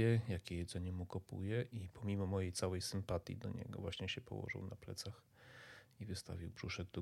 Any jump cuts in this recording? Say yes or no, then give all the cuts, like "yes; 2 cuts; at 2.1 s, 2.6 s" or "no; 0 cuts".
yes; 1 cut; at 1.7 s